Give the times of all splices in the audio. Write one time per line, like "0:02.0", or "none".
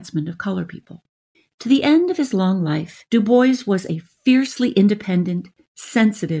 0:01.3
0:03.1